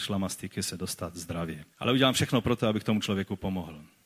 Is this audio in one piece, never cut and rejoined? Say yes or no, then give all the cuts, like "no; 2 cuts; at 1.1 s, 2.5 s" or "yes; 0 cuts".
no; 1 cut; at 1.7 s